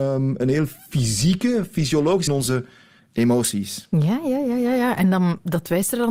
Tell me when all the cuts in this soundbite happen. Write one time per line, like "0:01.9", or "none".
0:02.3